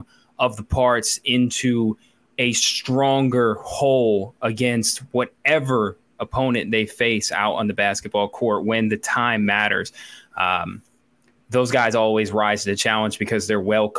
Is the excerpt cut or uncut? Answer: uncut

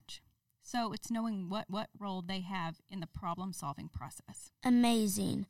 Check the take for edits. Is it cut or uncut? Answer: cut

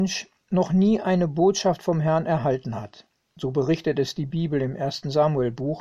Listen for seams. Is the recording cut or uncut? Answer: uncut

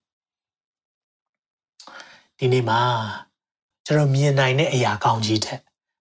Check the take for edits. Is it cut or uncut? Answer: cut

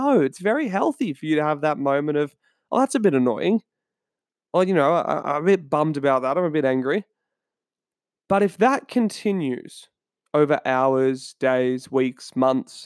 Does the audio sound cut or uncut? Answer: uncut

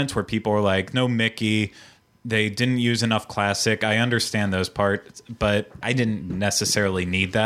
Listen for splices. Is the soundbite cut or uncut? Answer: cut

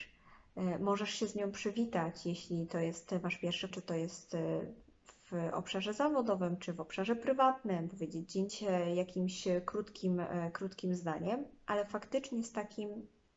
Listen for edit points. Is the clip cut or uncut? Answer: cut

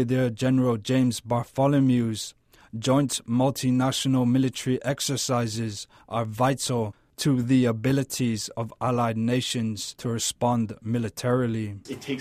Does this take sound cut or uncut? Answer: uncut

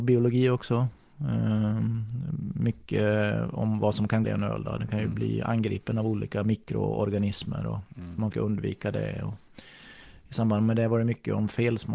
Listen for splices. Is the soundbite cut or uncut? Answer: cut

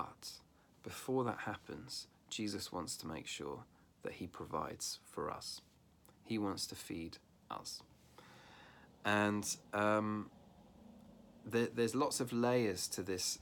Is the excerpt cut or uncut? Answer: uncut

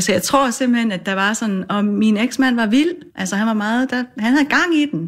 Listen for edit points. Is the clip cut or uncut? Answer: cut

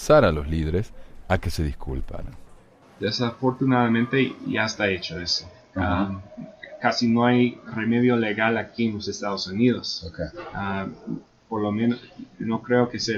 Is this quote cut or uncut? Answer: cut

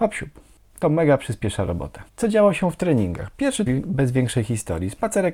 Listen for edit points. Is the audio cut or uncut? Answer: cut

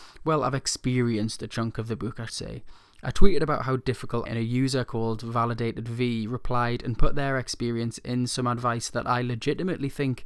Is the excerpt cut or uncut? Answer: cut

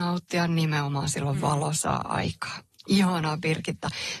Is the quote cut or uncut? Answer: uncut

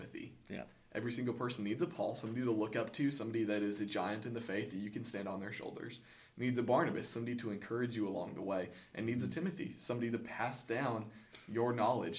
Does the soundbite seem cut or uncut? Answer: uncut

